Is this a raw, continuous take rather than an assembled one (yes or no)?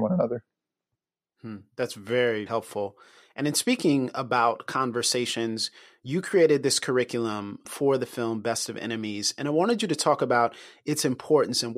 no